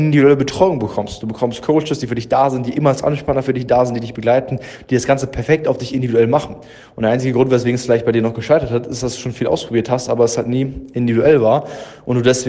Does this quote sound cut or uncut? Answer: uncut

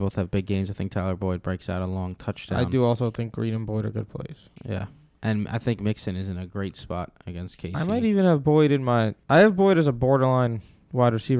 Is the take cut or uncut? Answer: cut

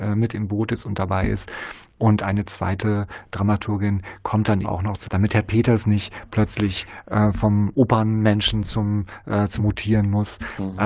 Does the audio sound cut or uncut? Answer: cut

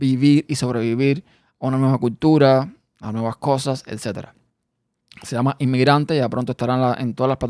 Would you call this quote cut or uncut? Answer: uncut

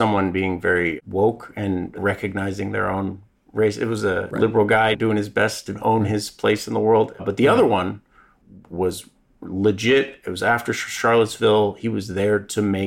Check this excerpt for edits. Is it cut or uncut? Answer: uncut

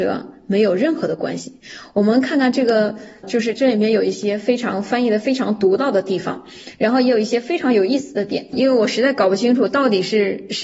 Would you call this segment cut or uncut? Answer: cut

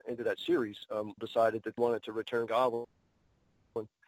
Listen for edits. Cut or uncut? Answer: cut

